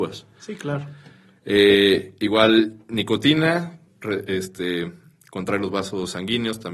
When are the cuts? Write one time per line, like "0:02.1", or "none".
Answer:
0:03.9